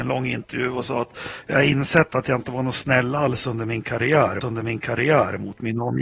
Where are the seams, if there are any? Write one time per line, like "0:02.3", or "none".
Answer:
0:04.4